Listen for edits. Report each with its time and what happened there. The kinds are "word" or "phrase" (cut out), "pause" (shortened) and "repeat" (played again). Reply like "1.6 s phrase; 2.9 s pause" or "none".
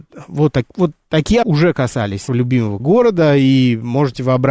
1.4 s word; 2.3 s word; 2.8 s word